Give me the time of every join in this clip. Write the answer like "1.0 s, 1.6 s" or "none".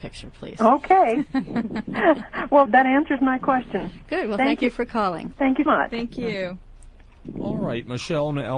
2.7 s, 5.7 s

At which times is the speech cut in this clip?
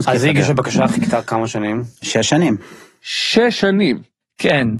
none

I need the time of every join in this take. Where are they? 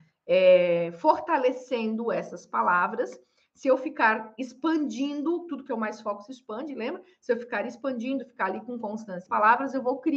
9.3 s

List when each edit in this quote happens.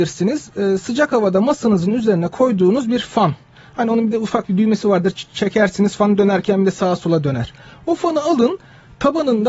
none

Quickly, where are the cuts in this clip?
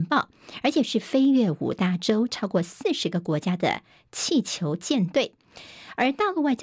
none

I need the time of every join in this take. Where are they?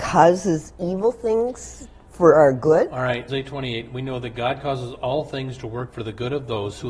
3.3 s, 5.9 s

